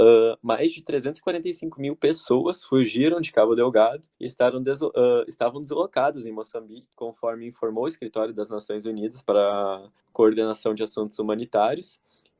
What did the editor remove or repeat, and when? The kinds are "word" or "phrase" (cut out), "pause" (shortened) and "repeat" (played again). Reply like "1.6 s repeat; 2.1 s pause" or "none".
4.1 s pause; 6.9 s pause; 10.0 s pause